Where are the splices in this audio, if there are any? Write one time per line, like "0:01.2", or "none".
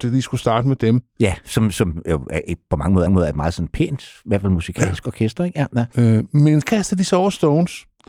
0:03.1
0:05.9
0:06.6